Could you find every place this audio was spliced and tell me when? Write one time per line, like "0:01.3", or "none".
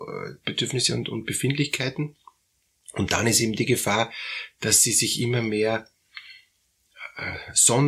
none